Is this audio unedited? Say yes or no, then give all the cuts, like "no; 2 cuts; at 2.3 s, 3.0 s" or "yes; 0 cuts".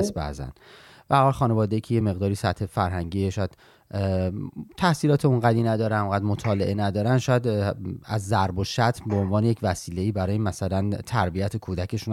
yes; 0 cuts